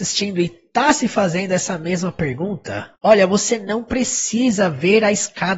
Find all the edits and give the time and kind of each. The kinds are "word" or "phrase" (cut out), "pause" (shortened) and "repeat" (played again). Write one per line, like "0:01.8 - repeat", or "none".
0:03.0 - pause